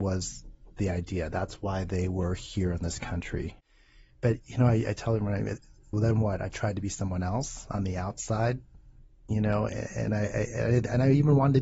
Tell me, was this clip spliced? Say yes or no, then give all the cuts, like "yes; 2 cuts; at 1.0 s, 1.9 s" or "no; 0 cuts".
yes; 1 cut; at 5.9 s